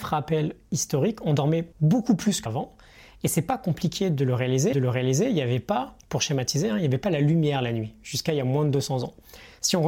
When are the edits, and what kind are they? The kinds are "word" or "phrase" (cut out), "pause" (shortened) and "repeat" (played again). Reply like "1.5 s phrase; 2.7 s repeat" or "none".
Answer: 1.7 s pause; 2.5 s word; 4.7 s repeat; 6.0 s pause